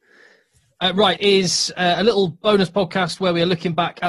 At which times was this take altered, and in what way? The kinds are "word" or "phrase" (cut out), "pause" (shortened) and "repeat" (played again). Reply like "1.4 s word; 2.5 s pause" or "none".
1.2 s phrase